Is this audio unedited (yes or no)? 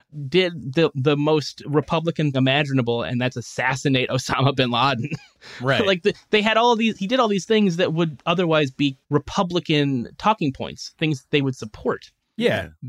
no